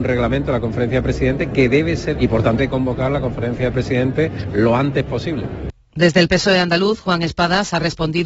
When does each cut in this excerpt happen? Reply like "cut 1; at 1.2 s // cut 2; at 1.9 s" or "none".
cut 1; at 2.1 s // cut 2; at 2.6 s